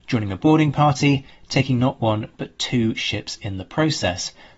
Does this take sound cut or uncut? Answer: uncut